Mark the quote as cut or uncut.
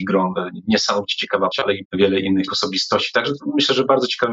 cut